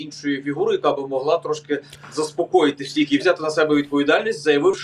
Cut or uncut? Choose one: cut